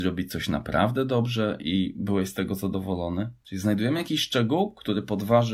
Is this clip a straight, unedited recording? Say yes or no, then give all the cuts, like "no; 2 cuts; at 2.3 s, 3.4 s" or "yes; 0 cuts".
yes; 0 cuts